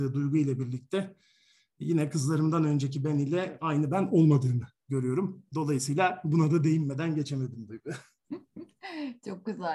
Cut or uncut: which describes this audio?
uncut